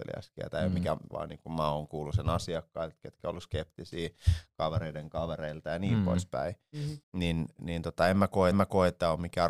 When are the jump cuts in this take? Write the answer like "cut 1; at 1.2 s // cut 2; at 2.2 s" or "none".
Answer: cut 1; at 1.1 s // cut 2; at 7.0 s // cut 3; at 8.5 s